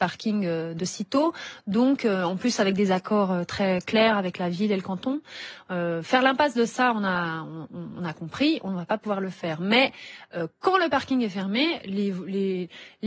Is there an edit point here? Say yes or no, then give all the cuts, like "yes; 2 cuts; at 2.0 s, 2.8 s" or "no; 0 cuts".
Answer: no; 0 cuts